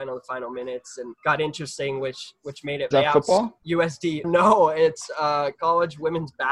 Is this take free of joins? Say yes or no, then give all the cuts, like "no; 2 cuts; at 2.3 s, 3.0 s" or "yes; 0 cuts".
no; 4 cuts; at 1.2 s, 2.9 s, 3.6 s, 4.2 s